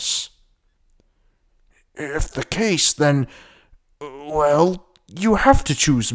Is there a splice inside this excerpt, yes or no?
yes